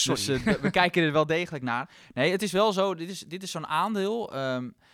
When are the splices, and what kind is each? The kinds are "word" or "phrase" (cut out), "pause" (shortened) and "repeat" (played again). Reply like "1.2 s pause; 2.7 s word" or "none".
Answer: none